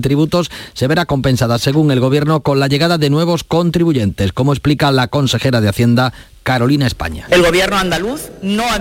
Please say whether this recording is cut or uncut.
uncut